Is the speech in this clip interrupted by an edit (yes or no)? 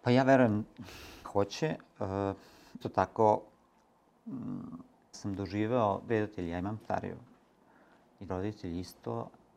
yes